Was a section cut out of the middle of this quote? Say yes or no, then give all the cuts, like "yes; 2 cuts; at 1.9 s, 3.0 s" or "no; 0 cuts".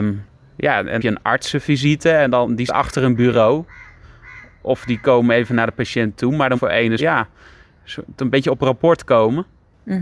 yes; 4 cuts; at 1.0 s, 2.7 s, 6.6 s, 7.0 s